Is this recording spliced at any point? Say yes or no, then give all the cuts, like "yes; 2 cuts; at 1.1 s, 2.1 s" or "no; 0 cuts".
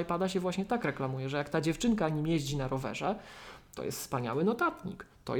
no; 0 cuts